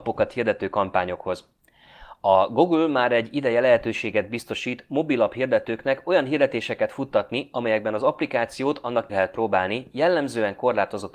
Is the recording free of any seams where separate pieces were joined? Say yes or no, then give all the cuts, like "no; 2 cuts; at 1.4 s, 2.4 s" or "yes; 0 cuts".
no; 1 cut; at 9.1 s